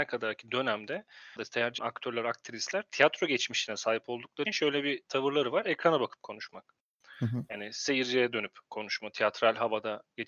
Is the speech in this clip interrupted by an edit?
yes; 3 cuts; at 1.4 s, 1.8 s, 4.5 s

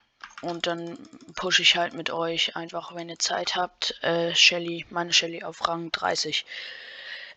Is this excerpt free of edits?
yes; 0 cuts

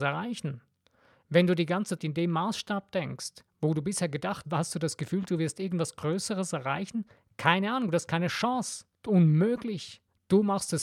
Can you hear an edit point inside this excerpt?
yes; 3 cuts; at 2.0 s, 4.4 s, 8.9 s

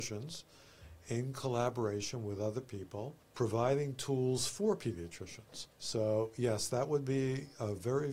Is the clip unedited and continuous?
no; 2 cuts; at 3.2 s, 5.7 s

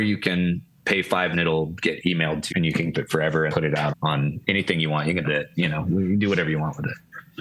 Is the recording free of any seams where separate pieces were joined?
no; 7 cuts; at 1.3 s, 2.5 s, 2.9 s, 3.5 s, 3.9 s, 4.4 s, 5.2 s

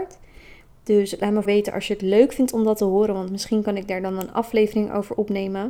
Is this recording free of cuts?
no; 1 cut; at 1.4 s

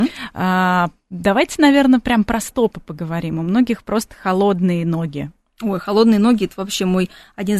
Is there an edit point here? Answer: no; 0 cuts

